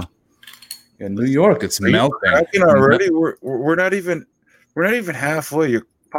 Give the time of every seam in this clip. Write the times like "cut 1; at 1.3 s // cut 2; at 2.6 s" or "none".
none